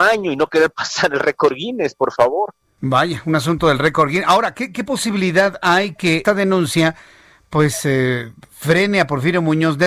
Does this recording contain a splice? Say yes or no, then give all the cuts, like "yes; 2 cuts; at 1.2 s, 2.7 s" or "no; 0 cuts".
yes; 1 cut; at 6.2 s